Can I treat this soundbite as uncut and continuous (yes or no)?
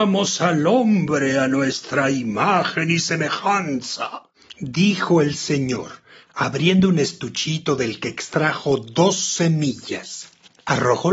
yes